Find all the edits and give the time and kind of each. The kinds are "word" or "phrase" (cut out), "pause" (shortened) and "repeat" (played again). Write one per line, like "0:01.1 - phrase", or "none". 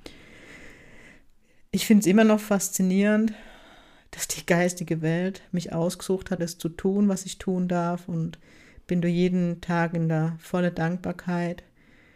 0:06.4 - word